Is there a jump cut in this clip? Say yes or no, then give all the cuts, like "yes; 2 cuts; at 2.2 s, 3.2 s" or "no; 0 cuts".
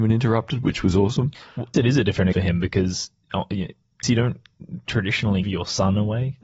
yes; 4 cuts; at 1.7 s, 2.3 s, 4.0 s, 5.4 s